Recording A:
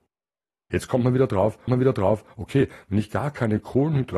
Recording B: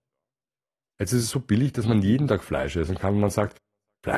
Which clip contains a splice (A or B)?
A